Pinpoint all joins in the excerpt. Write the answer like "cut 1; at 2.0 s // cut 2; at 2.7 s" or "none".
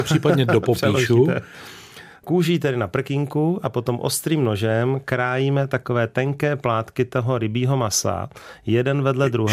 none

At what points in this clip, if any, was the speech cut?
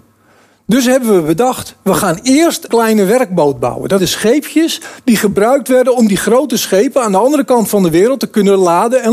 cut 1; at 2.7 s // cut 2; at 4.0 s

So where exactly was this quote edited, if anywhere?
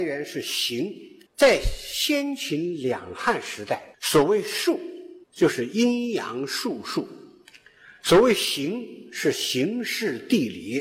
cut 1; at 1.3 s // cut 2; at 3.9 s // cut 3; at 5.2 s

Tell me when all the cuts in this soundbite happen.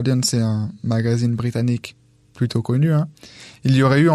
none

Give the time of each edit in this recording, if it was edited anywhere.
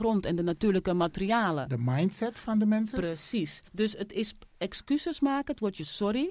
cut 1; at 3.7 s

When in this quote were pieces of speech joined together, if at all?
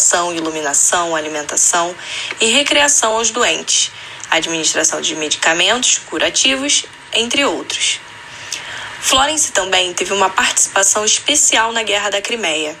none

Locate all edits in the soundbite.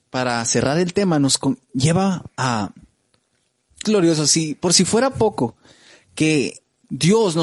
cut 1; at 3.9 s

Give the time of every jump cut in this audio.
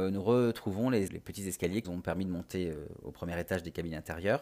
cut 1; at 1.1 s // cut 2; at 1.8 s

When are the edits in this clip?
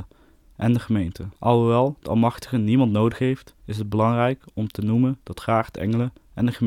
cut 1; at 1.4 s // cut 2; at 3.6 s // cut 3; at 5.4 s

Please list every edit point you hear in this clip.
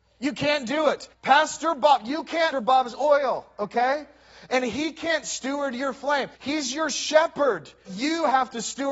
cut 1; at 1.1 s // cut 2; at 2.5 s // cut 3; at 6.4 s // cut 4; at 7.9 s

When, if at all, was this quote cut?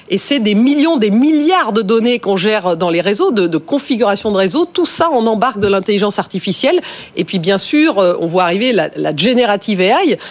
none

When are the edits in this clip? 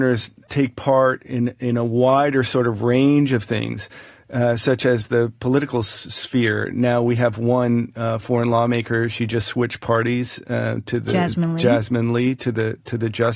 none

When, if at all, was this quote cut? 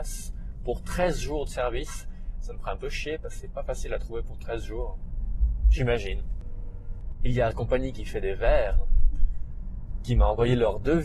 cut 1; at 7.5 s

